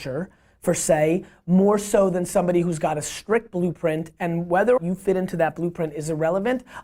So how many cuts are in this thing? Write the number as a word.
one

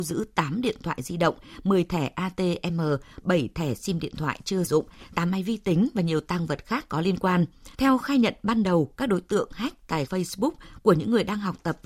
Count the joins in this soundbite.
three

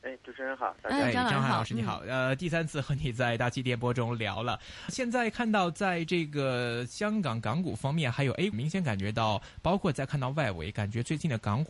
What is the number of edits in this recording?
two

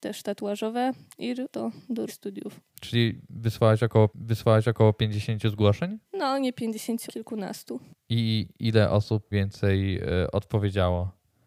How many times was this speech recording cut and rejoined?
eight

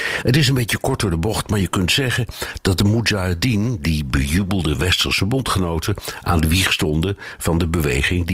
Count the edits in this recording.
zero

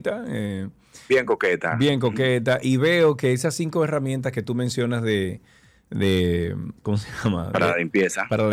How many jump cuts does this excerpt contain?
one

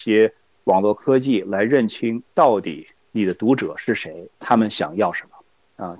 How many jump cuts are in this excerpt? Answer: zero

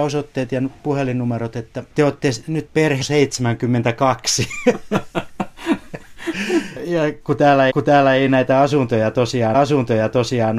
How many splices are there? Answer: four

